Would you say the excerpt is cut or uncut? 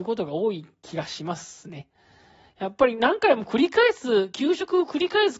uncut